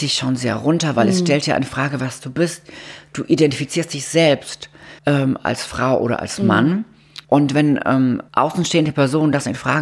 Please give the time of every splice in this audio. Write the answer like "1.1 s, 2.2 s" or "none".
5.0 s, 7.2 s, 8.3 s